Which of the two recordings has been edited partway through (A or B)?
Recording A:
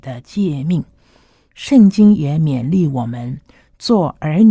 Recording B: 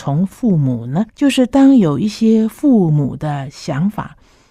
B